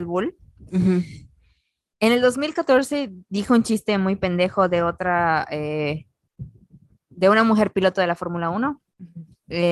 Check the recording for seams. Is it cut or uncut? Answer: uncut